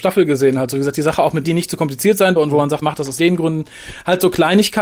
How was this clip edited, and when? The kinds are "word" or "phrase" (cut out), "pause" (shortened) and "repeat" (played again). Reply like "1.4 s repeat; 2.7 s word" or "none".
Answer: 1.4 s word; 2.4 s word; 2.8 s word; 3.2 s word